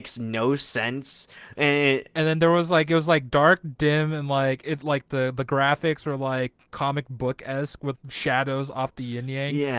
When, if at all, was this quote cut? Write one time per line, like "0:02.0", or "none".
0:08.0